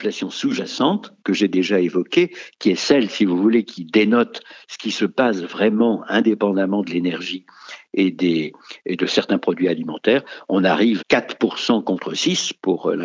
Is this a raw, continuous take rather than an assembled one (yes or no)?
no